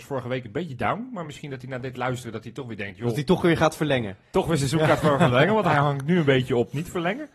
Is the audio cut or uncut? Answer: uncut